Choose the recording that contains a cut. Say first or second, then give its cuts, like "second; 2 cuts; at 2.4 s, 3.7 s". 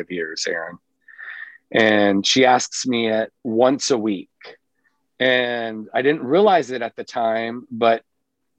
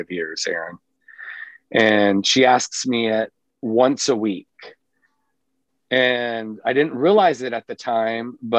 first; 2 cuts; at 3.4 s, 5.0 s